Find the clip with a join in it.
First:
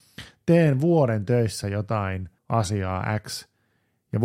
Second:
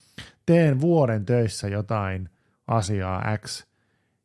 first; 1 cut; at 2.4 s

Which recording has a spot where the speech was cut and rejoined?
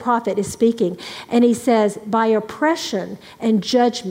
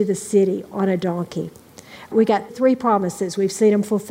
second; 2 cuts; at 2.1 s, 2.5 s

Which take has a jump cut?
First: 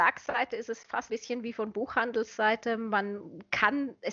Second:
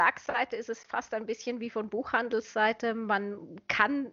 first; 1 cut; at 1.1 s

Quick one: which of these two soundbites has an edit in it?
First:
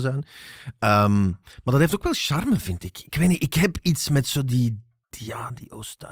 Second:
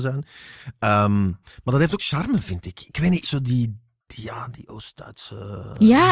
second; 2 cuts; at 2.0 s, 3.2 s

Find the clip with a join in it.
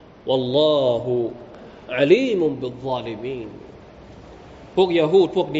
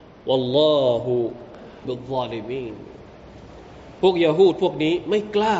second; 1 cut; at 1.8 s

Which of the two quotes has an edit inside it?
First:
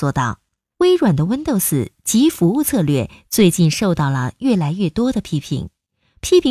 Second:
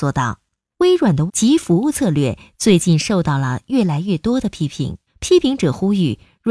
second; 2 cuts; at 1.3 s, 5.1 s

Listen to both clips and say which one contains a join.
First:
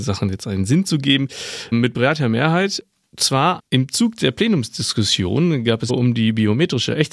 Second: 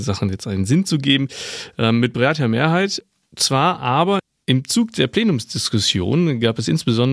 first; 3 cuts; at 1.7 s, 3.6 s, 5.9 s

